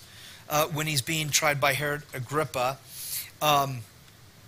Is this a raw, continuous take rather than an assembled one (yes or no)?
yes